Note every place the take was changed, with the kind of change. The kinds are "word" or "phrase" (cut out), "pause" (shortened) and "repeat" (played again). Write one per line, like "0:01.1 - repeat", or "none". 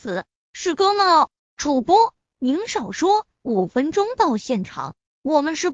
0:01.4 - pause